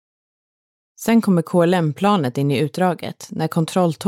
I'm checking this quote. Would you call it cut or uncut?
uncut